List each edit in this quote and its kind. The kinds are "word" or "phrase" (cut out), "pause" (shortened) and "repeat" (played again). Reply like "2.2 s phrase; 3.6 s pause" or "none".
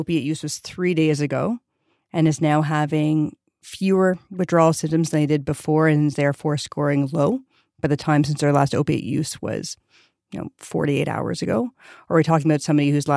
none